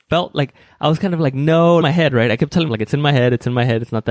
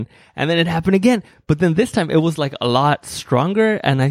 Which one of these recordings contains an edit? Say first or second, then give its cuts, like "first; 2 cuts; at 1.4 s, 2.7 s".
first; 2 cuts; at 1.8 s, 2.7 s